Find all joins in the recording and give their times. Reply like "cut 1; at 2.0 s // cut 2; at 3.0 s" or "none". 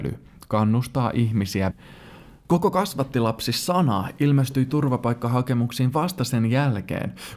cut 1; at 1.7 s